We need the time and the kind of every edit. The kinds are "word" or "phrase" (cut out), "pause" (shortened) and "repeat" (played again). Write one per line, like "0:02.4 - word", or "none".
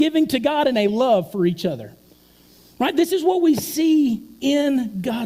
none